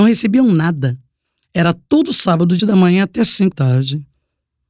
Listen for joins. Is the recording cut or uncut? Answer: cut